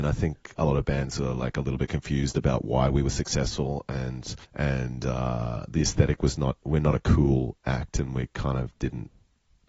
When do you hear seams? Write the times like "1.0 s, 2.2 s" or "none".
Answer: 4.4 s, 6.6 s

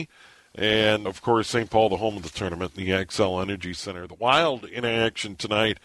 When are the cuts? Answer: 1.0 s

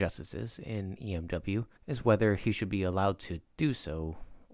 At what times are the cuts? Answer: 1.8 s

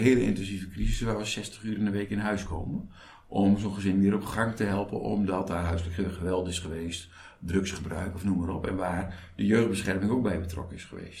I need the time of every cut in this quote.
none

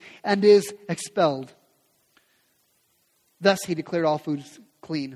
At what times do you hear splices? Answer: none

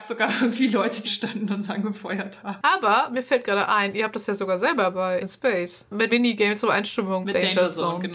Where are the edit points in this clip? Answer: 1.0 s, 5.2 s, 6.1 s, 7.2 s

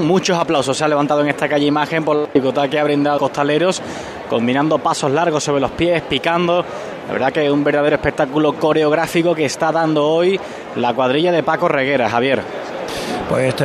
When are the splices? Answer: 3.2 s

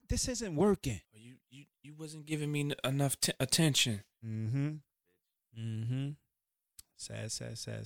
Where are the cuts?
1.0 s, 5.0 s

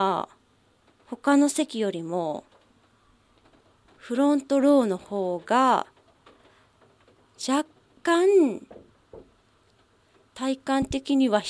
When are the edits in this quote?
none

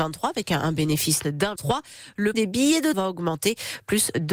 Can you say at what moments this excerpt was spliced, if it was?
1.2 s, 1.6 s, 2.3 s, 2.9 s

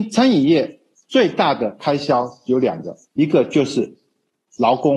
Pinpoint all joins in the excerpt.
0.9 s, 3.1 s

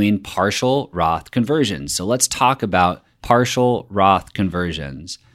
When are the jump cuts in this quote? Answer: none

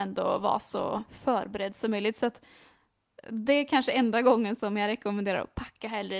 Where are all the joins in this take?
none

